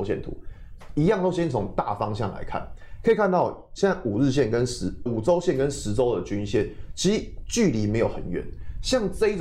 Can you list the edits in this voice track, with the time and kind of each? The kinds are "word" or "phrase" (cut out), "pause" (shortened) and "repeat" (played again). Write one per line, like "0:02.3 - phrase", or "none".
0:05.1 - word